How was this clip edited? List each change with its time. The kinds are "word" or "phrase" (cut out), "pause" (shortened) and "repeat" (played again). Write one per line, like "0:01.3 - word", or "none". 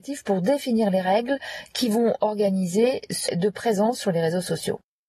0:03.3 - word